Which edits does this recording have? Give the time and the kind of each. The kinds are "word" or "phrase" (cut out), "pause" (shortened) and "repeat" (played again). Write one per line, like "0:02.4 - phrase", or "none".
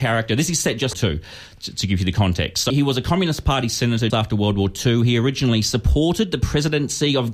0:00.9 - phrase
0:02.7 - word
0:04.1 - word